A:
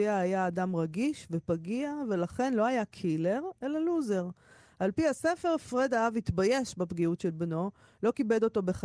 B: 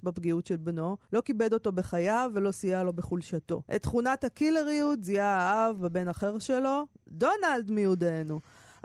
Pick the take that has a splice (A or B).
B